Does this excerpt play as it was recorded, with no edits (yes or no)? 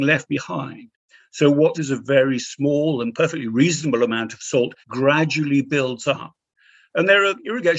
no